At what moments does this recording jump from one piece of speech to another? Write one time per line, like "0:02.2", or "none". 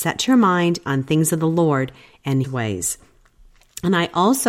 0:02.4